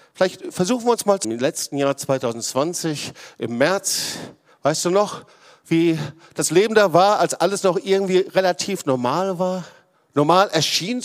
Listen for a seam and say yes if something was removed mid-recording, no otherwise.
yes